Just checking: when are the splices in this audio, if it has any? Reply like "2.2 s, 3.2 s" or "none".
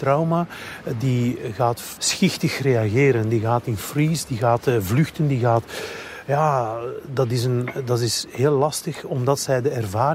2.0 s